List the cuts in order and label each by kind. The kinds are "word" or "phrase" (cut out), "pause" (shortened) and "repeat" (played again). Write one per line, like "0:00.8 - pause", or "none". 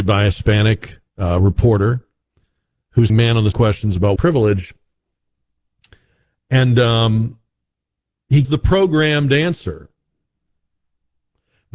0:01.1 - pause
0:03.1 - word
0:03.5 - word
0:04.2 - word
0:08.4 - word